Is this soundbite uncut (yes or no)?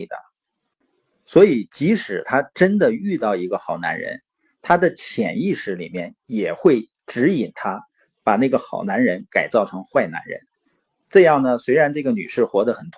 yes